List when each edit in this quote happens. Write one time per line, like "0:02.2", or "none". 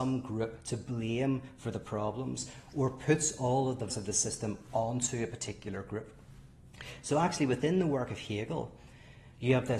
0:03.9

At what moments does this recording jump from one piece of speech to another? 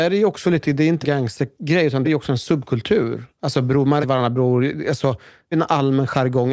0:01.0
0:02.0
0:04.0
0:05.5

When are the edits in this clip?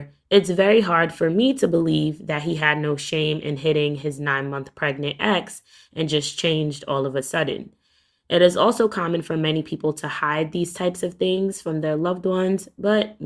none

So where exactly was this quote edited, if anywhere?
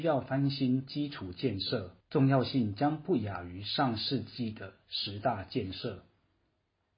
0:02.0

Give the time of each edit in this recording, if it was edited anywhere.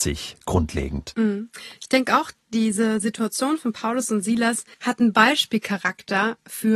0:02.4
0:04.7

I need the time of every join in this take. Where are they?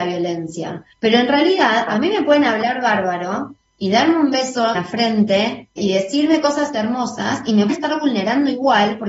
0:00.9
0:04.7
0:05.8
0:07.7

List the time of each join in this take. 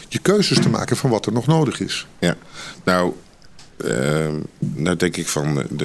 0:03.7

